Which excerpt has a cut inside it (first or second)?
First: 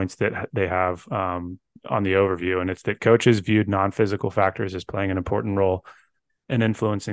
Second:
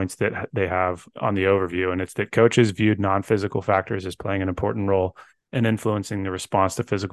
second